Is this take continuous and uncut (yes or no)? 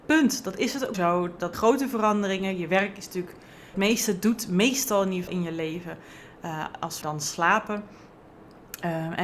no